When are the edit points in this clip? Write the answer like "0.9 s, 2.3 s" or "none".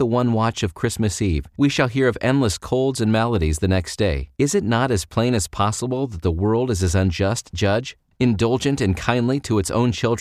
4.3 s